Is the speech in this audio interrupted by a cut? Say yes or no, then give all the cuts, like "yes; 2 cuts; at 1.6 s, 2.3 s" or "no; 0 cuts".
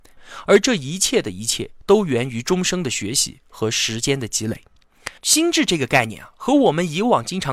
yes; 1 cut; at 5.2 s